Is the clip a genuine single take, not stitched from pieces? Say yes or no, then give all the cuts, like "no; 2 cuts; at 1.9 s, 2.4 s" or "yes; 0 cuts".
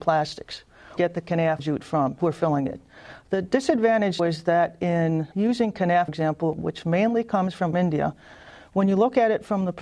no; 7 cuts; at 1.0 s, 1.6 s, 2.2 s, 4.2 s, 5.3 s, 6.1 s, 7.7 s